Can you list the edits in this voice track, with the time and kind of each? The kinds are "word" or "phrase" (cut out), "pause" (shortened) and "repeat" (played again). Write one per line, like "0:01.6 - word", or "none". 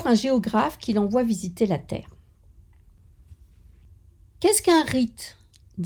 none